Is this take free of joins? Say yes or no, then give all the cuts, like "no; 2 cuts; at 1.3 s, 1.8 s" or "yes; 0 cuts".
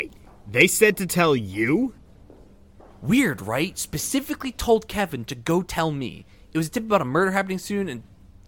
yes; 0 cuts